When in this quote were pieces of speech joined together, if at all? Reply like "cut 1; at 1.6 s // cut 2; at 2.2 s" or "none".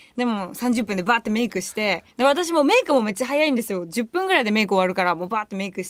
cut 1; at 2.1 s